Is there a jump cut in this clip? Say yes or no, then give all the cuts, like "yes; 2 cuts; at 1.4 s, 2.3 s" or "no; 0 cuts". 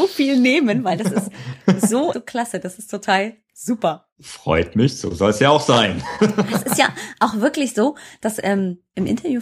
yes; 1 cut; at 2.1 s